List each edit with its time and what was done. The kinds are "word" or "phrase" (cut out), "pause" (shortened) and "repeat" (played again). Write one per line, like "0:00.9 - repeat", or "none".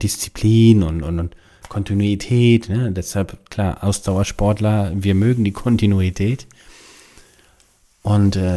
none